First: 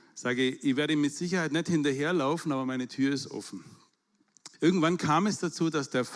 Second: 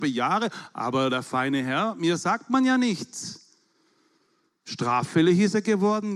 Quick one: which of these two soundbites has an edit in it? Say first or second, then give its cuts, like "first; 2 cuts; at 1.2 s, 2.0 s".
first; 1 cut; at 4.5 s